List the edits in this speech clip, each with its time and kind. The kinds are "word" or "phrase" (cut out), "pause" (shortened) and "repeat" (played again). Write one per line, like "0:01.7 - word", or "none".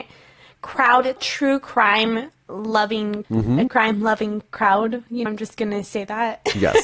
0:01.2 - word
0:03.2 - word
0:03.7 - word
0:05.3 - word